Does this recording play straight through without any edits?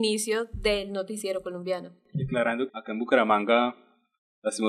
no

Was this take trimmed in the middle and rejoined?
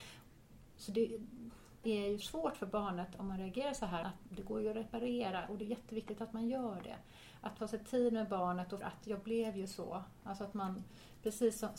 yes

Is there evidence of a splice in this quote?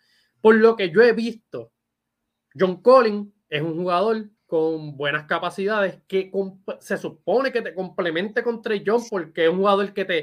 yes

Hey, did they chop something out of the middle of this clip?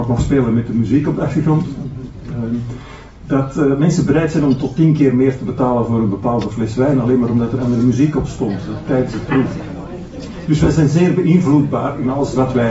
no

